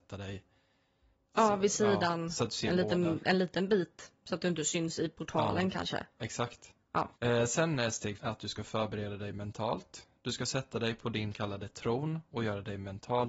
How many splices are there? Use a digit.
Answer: 3